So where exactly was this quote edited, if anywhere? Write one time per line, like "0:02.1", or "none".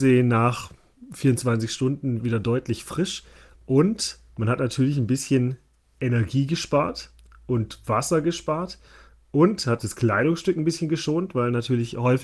0:02.2
0:09.8